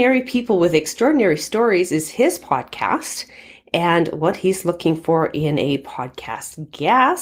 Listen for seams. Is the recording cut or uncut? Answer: uncut